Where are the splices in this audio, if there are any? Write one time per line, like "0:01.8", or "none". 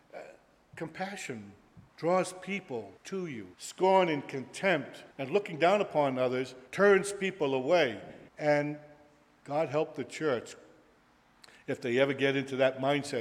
0:01.9
0:03.0
0:03.5
0:05.1
0:06.7
0:08.3

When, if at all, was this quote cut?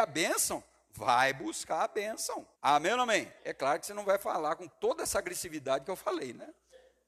0:02.5
0:03.4

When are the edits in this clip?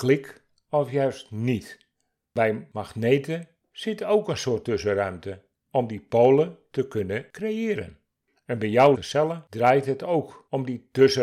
0:08.9

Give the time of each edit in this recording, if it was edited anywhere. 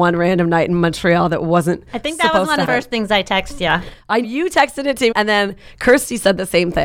0:02.6
0:04.2
0:05.1

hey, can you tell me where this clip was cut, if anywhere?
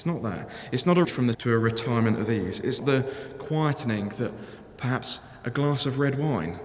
0:01.0
0:01.3
0:02.8

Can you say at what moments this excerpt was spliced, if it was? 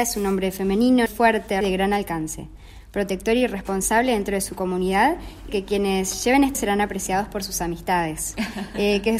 0:01.1
0:01.6
0:05.5
0:06.5

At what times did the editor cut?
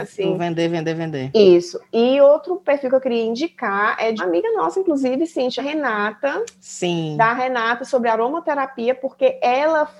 0:04.2
0:05.6

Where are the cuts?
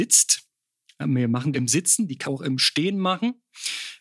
0:01.5
0:02.2

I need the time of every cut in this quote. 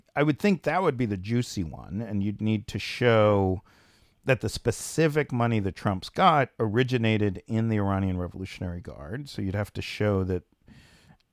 none

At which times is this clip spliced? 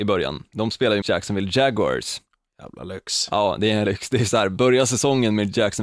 0:01.0
0:03.9

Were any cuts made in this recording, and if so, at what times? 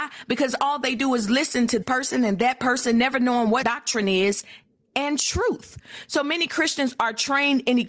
0:01.8
0:03.6

